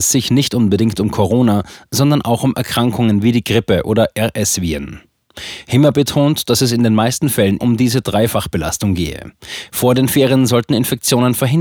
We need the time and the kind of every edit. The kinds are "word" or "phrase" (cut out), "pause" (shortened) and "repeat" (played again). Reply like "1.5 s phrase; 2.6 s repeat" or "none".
7.6 s word